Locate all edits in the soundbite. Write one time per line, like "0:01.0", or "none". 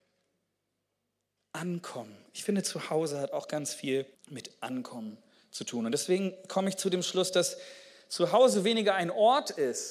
0:04.1